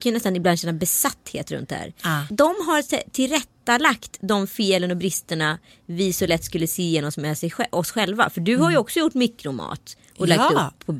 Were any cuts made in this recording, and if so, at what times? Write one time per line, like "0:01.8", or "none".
none